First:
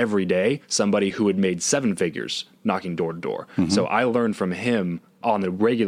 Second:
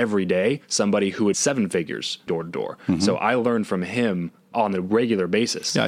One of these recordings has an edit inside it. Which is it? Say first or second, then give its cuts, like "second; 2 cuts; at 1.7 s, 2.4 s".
second; 2 cuts; at 1.3 s, 2.3 s